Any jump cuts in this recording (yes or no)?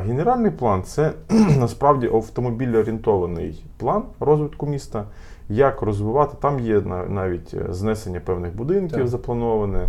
no